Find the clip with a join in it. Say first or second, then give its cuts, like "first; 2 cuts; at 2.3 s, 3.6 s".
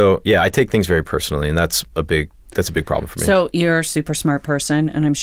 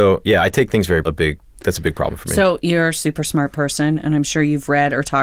second; 1 cut; at 1.0 s